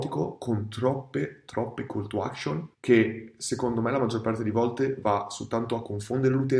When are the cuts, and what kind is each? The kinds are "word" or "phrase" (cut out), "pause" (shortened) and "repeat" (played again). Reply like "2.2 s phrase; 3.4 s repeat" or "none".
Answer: 2.7 s pause

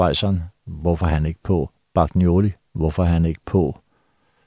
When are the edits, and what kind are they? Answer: none

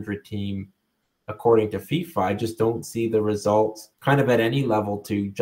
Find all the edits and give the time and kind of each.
3.9 s pause

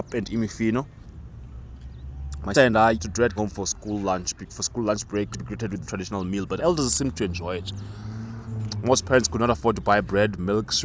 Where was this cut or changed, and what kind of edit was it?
2.5 s word; 2.9 s word; 3.4 s word; 4.5 s word; 5.3 s word; 5.9 s word; 6.6 s word

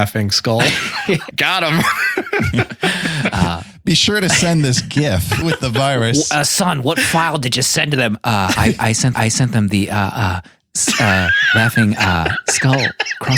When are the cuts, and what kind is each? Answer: 1.3 s word; 5.4 s word; 8.6 s word; 9.1 s repeat

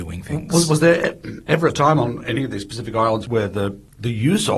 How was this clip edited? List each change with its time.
none

